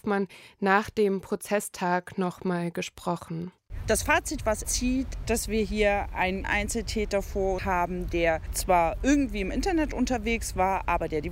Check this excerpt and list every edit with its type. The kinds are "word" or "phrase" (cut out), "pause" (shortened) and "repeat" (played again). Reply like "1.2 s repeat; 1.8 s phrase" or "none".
4.6 s word; 5.2 s word; 6.4 s word; 7.6 s word